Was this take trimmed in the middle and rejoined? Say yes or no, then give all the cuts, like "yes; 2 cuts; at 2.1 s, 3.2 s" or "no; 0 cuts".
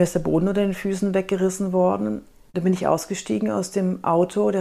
no; 0 cuts